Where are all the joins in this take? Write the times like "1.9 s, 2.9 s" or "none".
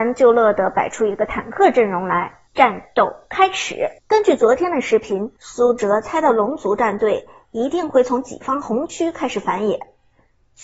2.5 s, 4.0 s, 5.4 s